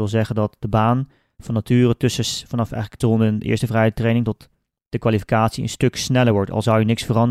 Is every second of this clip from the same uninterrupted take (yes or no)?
no